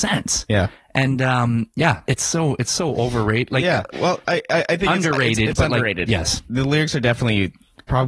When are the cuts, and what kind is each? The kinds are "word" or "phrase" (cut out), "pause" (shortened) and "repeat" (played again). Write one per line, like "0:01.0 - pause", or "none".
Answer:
0:02.1 - word
0:03.9 - word